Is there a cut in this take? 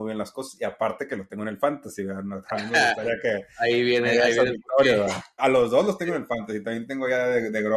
yes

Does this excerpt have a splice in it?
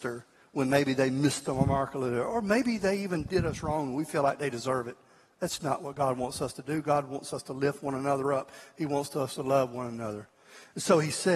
no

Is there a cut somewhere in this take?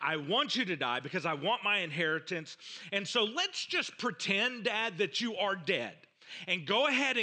no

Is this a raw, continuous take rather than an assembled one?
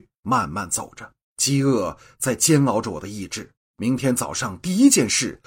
no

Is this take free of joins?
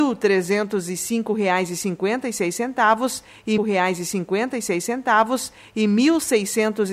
no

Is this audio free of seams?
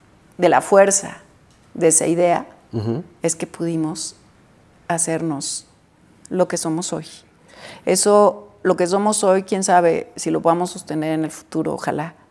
yes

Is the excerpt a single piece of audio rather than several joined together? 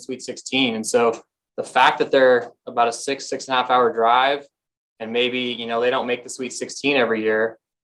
yes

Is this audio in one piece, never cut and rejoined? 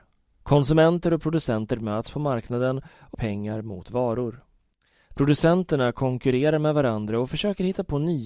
no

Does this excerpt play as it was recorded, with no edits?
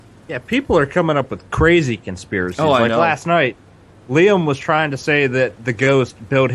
yes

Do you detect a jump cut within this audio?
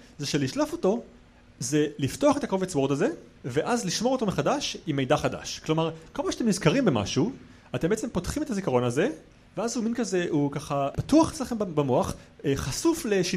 no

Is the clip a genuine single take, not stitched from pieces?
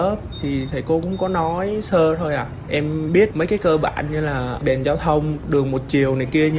yes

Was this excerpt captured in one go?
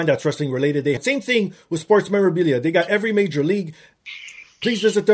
no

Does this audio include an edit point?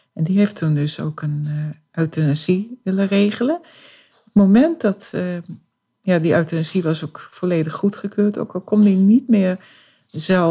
no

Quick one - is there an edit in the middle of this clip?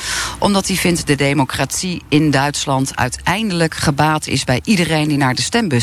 yes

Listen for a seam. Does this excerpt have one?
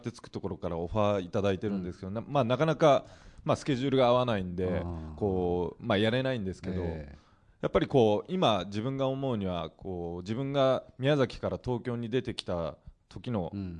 no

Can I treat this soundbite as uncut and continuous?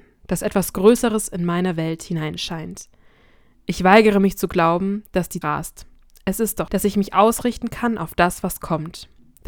no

